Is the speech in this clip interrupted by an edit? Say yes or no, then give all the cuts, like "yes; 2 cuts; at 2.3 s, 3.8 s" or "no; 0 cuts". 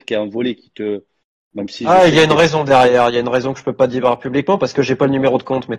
no; 0 cuts